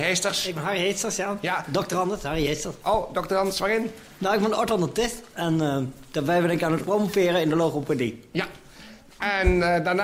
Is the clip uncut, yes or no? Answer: yes